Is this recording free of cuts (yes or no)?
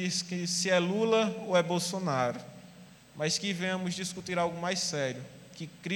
no